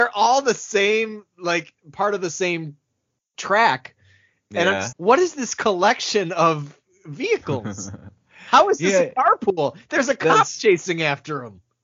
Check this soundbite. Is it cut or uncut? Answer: cut